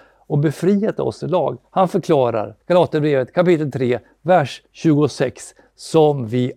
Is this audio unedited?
no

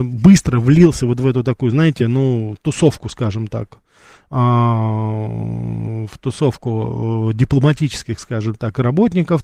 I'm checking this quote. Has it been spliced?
no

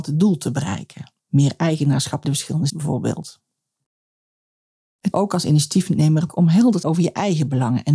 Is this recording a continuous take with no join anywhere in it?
no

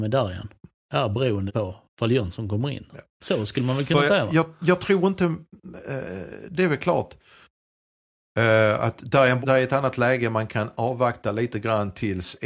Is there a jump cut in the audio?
yes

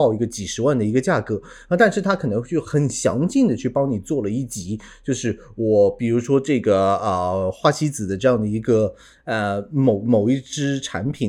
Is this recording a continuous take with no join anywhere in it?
yes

